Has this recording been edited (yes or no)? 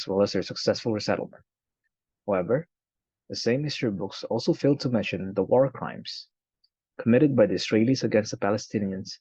no